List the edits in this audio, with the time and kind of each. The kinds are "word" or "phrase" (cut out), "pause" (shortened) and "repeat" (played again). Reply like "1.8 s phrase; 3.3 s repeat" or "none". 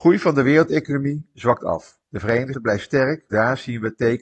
2.0 s pause; 2.5 s word; 3.3 s phrase